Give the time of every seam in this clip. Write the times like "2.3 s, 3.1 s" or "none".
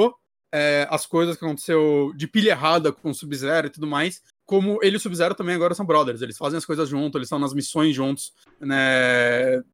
none